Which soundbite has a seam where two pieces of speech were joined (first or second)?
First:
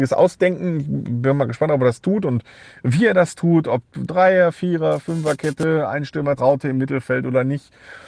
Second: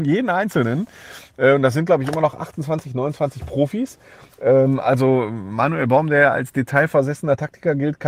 first